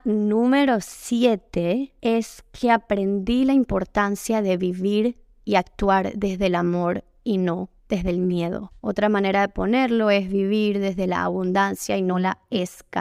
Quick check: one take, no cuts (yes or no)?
no